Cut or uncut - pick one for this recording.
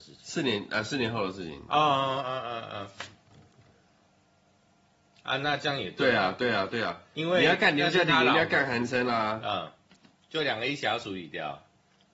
uncut